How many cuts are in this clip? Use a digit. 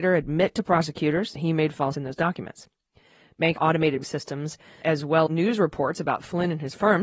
6